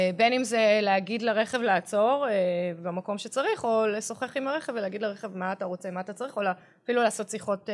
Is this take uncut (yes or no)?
yes